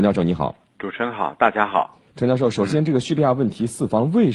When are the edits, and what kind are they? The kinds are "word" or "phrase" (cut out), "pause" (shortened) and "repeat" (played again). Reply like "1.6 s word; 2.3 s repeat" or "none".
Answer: 2.1 s pause